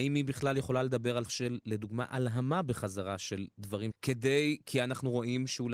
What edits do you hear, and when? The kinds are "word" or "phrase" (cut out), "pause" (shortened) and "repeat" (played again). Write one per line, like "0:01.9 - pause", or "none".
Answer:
0:01.2 - word
0:03.9 - word